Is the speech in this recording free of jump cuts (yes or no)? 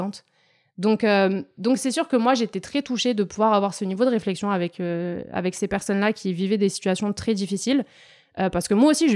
yes